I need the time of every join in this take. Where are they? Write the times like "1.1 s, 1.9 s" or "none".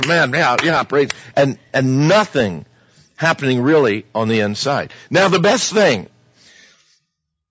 none